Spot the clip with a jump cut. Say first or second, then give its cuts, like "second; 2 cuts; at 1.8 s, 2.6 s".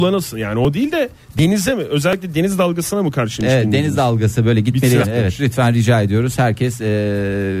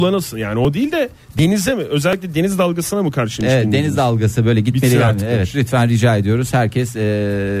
first; 1 cut; at 5.0 s